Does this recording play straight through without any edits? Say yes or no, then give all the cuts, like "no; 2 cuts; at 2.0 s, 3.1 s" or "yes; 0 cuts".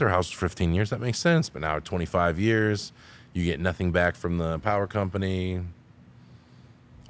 yes; 0 cuts